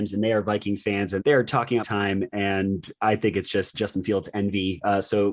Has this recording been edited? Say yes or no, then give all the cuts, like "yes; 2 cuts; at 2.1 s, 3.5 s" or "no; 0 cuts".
yes; 3 cuts; at 1.2 s, 1.8 s, 3.7 s